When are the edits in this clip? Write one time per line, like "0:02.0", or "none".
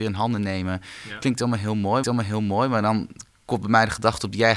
0:02.0